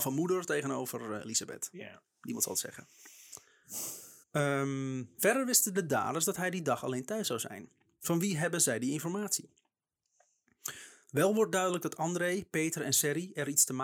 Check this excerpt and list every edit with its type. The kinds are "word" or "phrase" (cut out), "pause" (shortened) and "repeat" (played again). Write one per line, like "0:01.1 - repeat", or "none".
0:04.2 - pause